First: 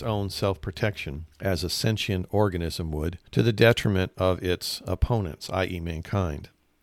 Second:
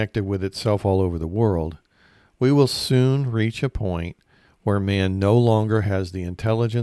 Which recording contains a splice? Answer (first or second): first